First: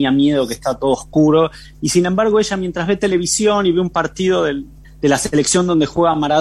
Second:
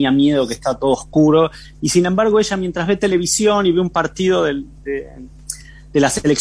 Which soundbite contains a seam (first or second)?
first